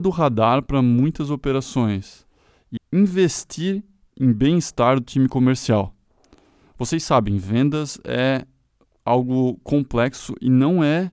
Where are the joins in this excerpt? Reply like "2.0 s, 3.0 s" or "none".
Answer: 2.8 s

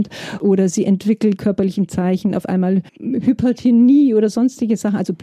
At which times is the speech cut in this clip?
1.4 s, 2.9 s

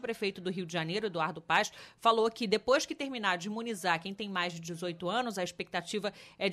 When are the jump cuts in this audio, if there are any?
none

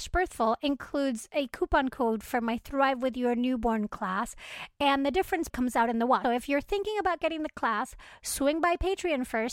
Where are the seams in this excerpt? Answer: 5.5 s, 6.2 s

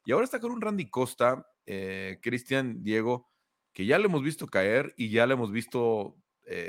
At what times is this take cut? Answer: none

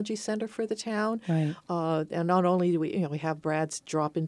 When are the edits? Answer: none

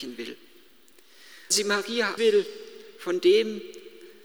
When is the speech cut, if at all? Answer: 1.5 s, 2.2 s

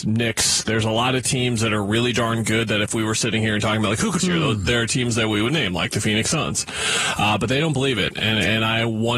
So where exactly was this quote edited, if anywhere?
4.2 s

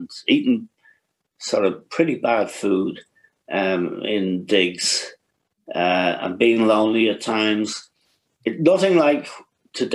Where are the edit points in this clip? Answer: none

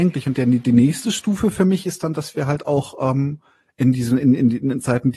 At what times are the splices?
none

